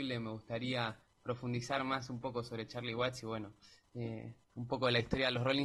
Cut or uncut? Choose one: uncut